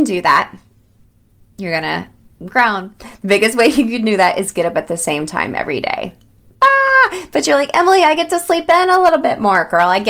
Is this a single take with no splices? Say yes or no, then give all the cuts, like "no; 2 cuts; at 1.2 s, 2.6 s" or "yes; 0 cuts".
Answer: yes; 0 cuts